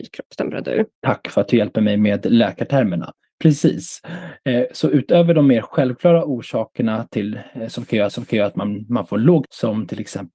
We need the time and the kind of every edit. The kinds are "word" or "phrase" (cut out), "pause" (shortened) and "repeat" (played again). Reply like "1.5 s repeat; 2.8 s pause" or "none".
0.9 s pause; 8.1 s repeat; 9.4 s word